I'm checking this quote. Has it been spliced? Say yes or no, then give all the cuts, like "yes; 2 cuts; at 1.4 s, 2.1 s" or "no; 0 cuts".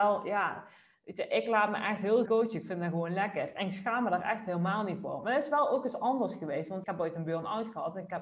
yes; 2 cuts; at 2.3 s, 6.8 s